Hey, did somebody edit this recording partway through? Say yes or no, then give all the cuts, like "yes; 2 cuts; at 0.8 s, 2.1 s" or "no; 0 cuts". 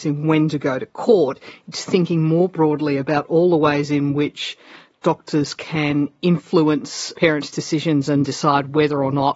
no; 0 cuts